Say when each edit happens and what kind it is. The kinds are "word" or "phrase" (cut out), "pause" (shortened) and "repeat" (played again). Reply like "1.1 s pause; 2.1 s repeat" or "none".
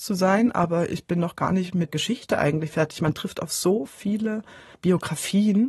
1.9 s word; 4.7 s word